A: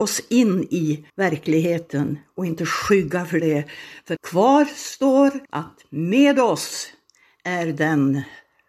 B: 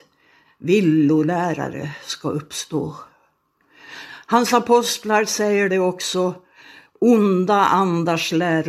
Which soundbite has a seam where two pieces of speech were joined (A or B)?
A